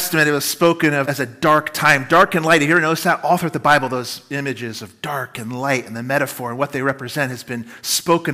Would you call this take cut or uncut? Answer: cut